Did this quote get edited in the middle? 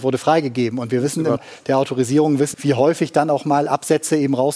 yes; 2 cuts; at 1.4 s, 2.5 s

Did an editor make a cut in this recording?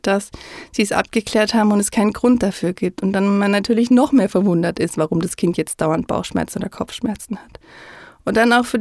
no; 0 cuts

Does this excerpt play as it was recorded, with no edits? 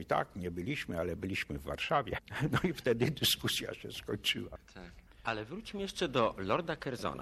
yes; 0 cuts

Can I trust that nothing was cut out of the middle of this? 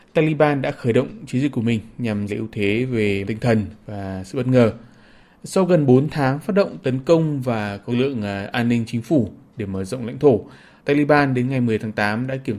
no; 3 cuts; at 2.3 s, 3.3 s, 7.9 s

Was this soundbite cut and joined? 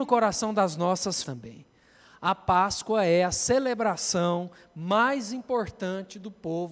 yes; 1 cut; at 1.2 s

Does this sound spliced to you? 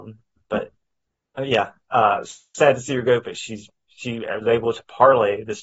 no; 0 cuts

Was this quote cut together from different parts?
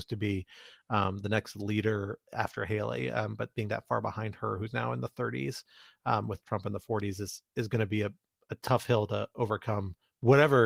no; 0 cuts

